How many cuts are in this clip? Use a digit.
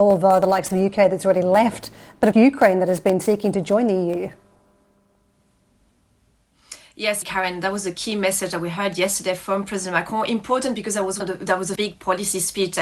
4